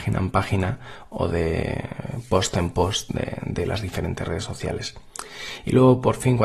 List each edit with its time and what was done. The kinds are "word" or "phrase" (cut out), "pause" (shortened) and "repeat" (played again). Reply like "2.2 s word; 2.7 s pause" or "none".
none